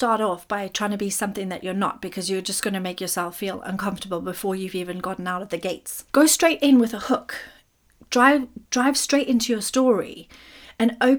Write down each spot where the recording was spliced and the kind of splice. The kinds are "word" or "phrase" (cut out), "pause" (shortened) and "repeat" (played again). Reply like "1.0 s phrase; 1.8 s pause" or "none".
6.1 s pause; 8.7 s pause